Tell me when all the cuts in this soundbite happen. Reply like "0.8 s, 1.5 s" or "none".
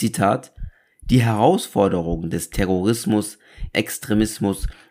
3.7 s

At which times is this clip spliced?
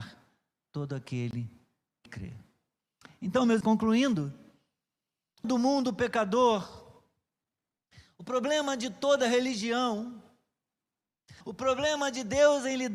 2.1 s, 3.6 s, 5.4 s, 11.4 s

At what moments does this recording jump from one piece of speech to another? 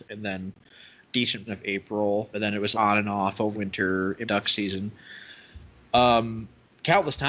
1.5 s, 2.3 s, 2.7 s, 3.5 s, 4.3 s

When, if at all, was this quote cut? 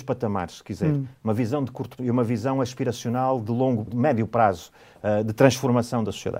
2.0 s, 3.9 s

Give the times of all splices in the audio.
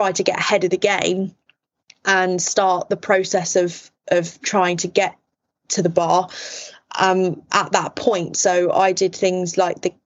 none

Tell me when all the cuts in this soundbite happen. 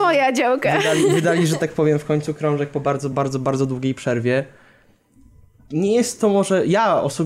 none

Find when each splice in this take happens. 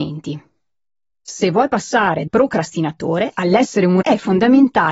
2.3 s, 4.0 s

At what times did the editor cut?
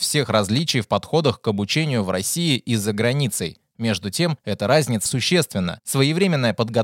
5.1 s

